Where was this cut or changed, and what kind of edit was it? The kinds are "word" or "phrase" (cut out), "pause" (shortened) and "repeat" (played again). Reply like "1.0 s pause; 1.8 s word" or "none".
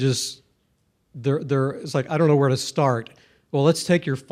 none